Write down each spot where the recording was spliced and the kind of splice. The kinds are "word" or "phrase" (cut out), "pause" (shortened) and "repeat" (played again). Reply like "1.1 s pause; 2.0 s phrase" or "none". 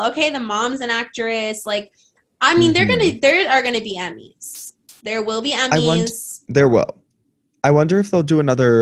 none